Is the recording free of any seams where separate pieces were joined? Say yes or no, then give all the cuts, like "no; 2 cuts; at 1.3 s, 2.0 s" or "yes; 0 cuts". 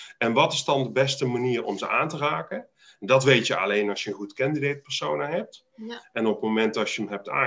yes; 0 cuts